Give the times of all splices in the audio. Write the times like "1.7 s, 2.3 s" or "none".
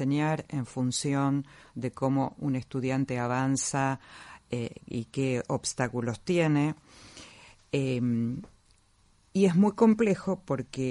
none